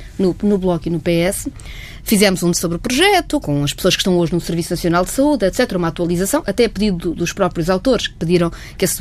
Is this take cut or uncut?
cut